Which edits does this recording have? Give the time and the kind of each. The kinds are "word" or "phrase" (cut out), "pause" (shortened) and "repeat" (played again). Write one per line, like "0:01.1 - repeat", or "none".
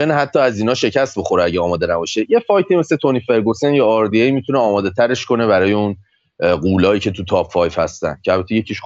none